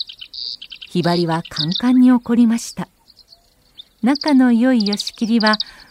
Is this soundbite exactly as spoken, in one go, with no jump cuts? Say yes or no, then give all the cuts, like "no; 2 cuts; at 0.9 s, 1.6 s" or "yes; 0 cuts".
no; 1 cut; at 3.9 s